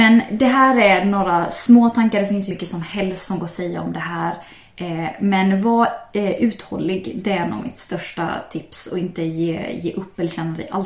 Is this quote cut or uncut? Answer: cut